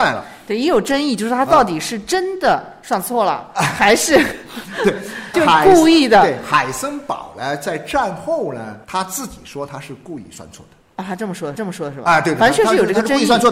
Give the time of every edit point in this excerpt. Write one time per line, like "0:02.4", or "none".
0:05.3
0:08.8
0:11.5